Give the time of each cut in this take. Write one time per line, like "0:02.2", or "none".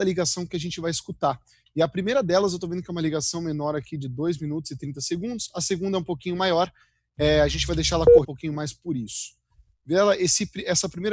0:08.2

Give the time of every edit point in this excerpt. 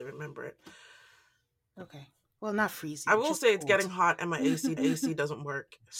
0:04.8

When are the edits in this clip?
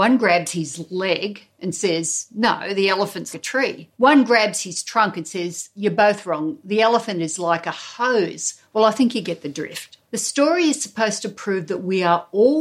0:03.3
0:03.9
0:10.0

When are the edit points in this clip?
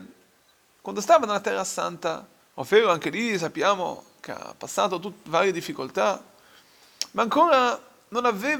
0:02.4

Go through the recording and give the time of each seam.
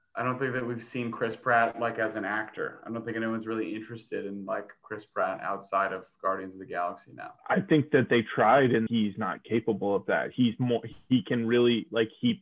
0:07.4
0:08.9

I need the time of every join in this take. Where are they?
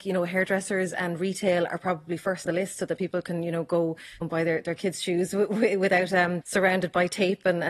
0:02.5
0:04.2
0:06.4

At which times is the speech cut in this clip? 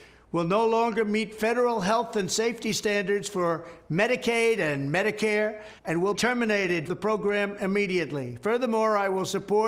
0:05.8
0:06.1
0:06.9

